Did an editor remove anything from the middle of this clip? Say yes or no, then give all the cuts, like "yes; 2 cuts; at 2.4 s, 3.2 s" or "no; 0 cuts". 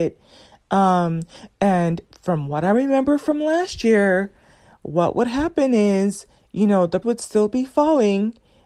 yes; 1 cut; at 7.0 s